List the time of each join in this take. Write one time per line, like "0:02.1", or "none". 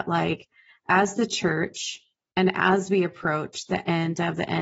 none

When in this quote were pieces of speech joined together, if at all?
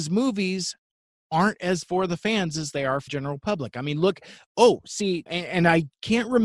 0:01.8
0:03.1
0:05.3

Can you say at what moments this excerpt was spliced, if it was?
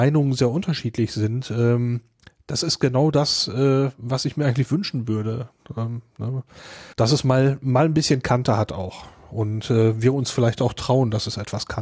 0:06.9

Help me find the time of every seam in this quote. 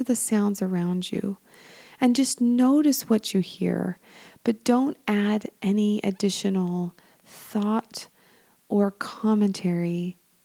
none

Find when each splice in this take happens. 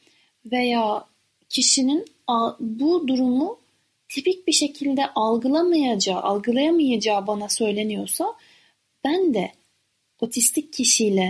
none

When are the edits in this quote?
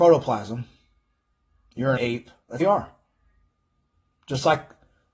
0:02.0
0:02.6

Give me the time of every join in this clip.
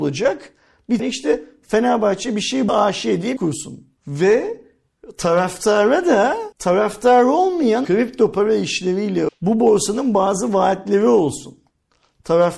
0:01.0
0:02.7
0:03.4
0:04.0
0:06.5
0:07.8
0:09.3

